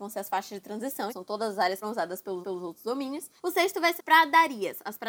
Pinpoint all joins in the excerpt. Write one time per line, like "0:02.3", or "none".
0:01.1
0:01.8
0:02.4
0:03.4
0:04.0

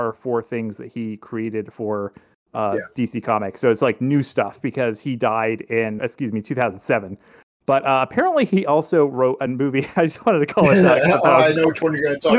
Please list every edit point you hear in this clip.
0:06.0

